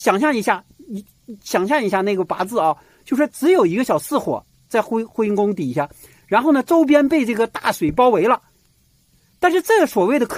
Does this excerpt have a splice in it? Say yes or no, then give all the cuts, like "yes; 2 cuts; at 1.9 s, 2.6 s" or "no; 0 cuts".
no; 0 cuts